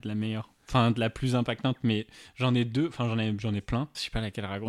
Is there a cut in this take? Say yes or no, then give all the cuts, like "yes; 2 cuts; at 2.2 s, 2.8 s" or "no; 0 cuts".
no; 0 cuts